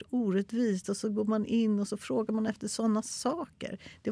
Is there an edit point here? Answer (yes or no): no